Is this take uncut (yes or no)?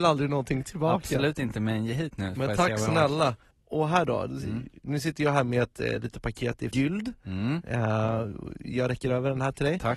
no